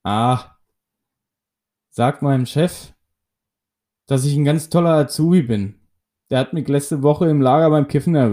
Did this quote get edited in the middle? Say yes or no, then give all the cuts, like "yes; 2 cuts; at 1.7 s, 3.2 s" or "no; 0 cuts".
no; 0 cuts